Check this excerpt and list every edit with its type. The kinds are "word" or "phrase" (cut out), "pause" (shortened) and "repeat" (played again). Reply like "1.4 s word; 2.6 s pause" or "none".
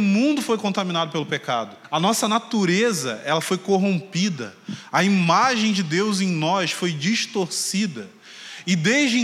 none